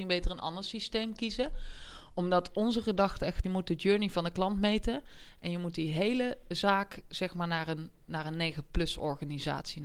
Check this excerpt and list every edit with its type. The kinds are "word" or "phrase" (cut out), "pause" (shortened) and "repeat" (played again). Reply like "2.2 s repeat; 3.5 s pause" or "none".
3.4 s word